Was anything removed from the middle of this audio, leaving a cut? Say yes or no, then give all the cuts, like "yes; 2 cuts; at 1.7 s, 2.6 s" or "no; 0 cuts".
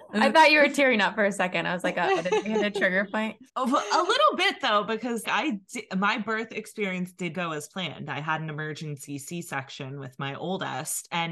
yes; 3 cuts; at 3.5 s, 5.2 s, 7.3 s